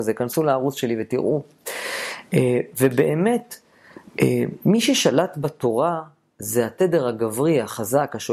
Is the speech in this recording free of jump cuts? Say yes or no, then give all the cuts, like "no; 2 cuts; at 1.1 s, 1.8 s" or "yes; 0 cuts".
yes; 0 cuts